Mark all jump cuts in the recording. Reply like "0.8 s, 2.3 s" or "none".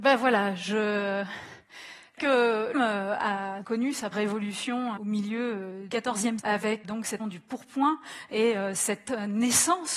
2.2 s, 2.7 s, 3.6 s, 4.1 s, 5.0 s, 5.9 s, 6.4 s, 6.8 s, 7.2 s